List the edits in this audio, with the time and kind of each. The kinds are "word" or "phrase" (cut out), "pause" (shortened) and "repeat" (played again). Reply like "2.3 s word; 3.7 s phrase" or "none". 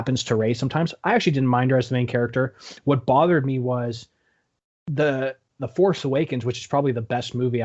none